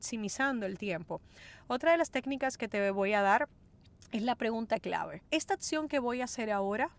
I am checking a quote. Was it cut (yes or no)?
yes